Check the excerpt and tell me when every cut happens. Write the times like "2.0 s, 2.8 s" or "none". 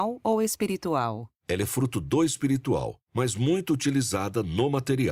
1.4 s, 3.0 s